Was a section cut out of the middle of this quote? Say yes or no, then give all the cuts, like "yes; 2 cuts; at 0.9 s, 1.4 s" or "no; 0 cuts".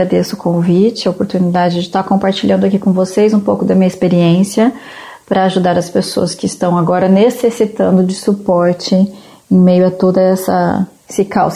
no; 0 cuts